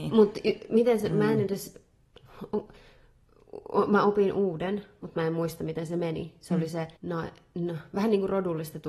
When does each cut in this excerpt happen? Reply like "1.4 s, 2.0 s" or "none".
7.0 s